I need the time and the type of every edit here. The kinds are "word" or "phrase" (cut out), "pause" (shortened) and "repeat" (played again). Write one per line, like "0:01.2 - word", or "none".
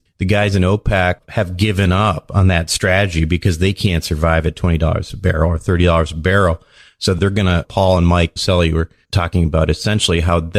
none